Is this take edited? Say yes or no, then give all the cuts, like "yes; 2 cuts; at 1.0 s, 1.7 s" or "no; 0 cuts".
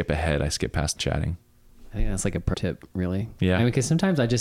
yes; 2 cuts; at 1.0 s, 2.5 s